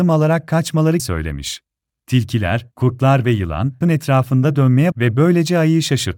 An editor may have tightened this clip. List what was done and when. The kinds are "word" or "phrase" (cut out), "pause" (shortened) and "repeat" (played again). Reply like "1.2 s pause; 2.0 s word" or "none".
1.0 s word; 1.8 s pause; 3.8 s word; 4.9 s word